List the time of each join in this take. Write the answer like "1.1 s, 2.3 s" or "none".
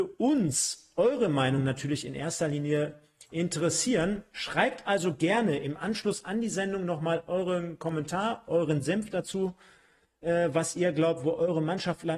none